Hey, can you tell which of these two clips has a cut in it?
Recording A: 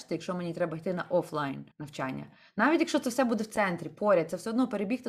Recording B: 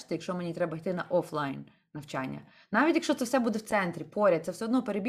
A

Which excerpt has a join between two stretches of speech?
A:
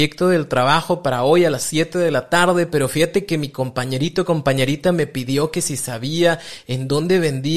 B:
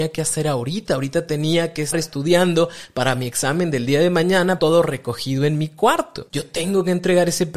B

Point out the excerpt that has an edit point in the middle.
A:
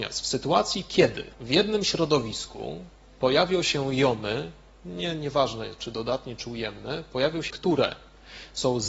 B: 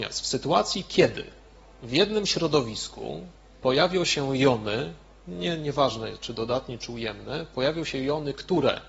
A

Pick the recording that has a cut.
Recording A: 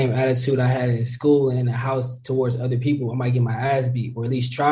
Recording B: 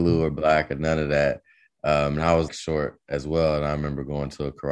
B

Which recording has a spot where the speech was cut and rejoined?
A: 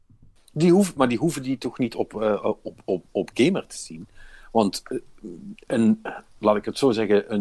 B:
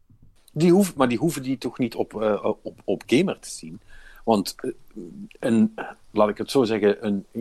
B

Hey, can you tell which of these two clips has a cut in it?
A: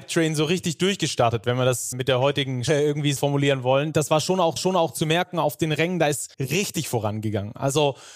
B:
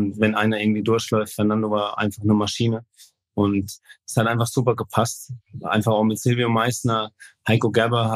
A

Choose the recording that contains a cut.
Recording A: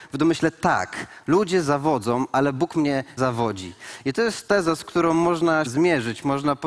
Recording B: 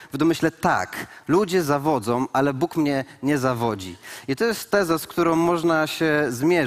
A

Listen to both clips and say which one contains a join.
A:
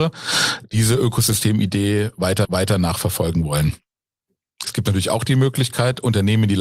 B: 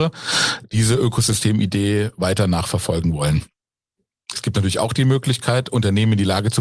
A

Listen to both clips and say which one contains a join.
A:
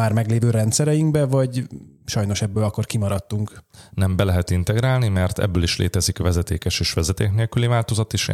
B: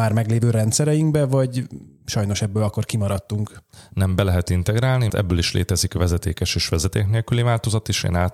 B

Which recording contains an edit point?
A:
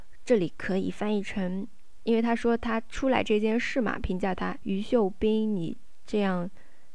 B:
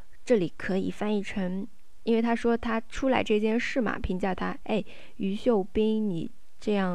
A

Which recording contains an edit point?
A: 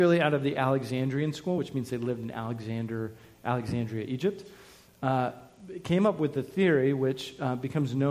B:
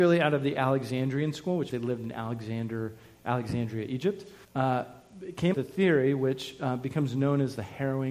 B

